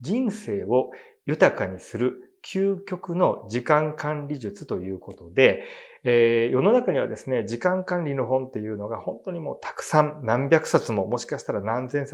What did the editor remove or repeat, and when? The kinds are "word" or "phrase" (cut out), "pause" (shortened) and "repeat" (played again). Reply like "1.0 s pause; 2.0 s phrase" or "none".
none